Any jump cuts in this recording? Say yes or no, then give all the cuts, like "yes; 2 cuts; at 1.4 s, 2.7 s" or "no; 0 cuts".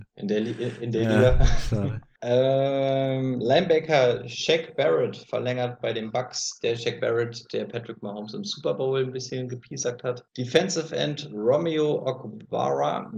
yes; 2 cuts; at 2.2 s, 10.3 s